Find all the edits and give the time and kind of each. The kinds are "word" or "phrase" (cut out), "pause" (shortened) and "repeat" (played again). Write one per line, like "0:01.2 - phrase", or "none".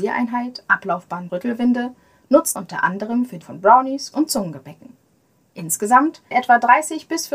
0:01.3 - word
0:02.6 - word
0:03.4 - word
0:04.1 - word
0:06.3 - word